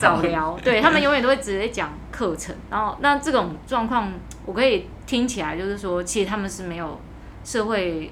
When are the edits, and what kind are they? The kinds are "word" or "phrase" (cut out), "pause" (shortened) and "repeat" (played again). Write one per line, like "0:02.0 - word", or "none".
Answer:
0:02.7 - word